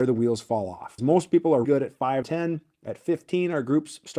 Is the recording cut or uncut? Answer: cut